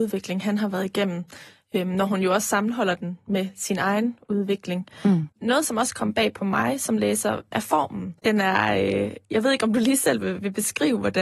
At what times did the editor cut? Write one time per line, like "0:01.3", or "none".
0:05.3
0:08.2